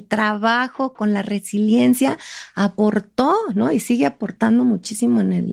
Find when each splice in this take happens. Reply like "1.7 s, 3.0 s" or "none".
none